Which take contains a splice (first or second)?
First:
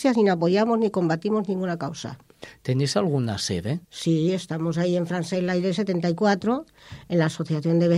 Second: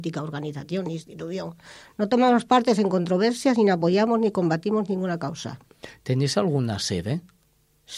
first